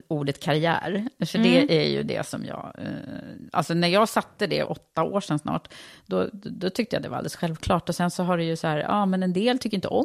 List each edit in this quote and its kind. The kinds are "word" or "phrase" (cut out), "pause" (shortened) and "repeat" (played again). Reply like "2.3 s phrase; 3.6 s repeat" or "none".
4.7 s phrase